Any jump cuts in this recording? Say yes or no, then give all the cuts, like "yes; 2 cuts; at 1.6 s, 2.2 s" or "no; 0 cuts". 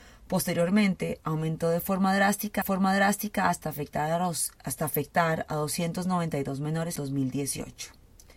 yes; 2 cuts; at 2.6 s, 7.0 s